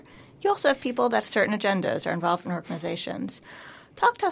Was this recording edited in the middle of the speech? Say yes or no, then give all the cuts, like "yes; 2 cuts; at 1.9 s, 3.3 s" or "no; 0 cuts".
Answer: yes; 2 cuts; at 1.2 s, 2.4 s